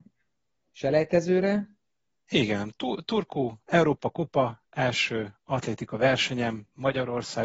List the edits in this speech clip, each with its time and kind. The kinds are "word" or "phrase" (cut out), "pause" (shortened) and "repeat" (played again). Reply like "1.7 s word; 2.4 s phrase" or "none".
none